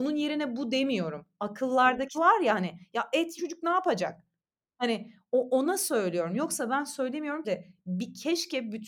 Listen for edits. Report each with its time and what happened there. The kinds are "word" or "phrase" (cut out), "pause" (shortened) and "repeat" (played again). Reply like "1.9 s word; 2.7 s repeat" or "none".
2.1 s word; 3.4 s phrase; 4.4 s pause; 7.4 s phrase